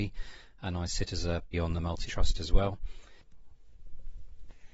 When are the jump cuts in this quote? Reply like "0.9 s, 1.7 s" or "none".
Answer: 1.5 s, 2.1 s